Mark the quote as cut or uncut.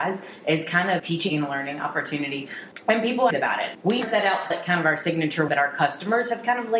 cut